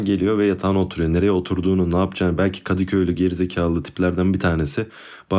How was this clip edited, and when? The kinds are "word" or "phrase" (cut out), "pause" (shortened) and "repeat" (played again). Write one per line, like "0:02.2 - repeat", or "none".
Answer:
none